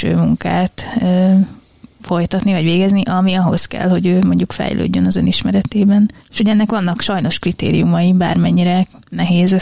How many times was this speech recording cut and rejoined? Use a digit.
1